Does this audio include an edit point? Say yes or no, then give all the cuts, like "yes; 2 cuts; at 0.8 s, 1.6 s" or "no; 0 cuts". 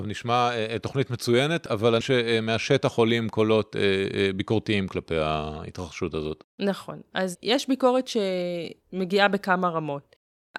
yes; 2 cuts; at 2.0 s, 8.8 s